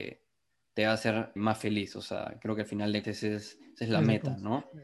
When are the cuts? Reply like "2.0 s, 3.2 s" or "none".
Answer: 1.4 s, 3.0 s